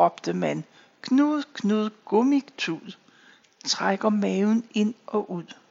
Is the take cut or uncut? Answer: uncut